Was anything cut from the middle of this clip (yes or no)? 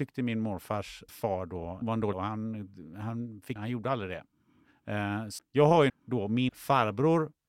yes